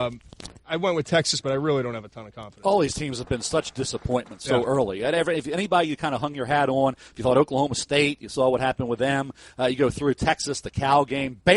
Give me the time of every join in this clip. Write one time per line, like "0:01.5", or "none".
none